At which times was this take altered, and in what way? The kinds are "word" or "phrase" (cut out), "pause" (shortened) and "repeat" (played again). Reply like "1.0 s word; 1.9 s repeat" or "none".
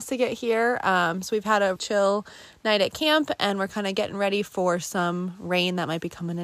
1.8 s word